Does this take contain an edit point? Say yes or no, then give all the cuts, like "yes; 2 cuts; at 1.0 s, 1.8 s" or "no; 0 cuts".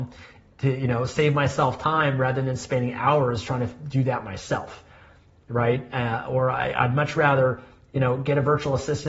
no; 0 cuts